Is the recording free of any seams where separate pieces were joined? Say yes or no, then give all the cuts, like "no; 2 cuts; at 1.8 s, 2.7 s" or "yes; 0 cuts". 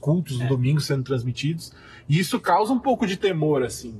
yes; 0 cuts